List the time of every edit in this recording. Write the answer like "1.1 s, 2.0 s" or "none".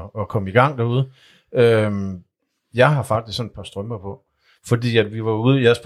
none